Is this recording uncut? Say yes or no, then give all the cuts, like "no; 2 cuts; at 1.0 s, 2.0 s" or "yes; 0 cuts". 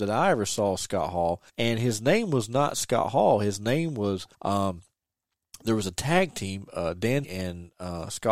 no; 3 cuts; at 1.5 s, 4.3 s, 7.2 s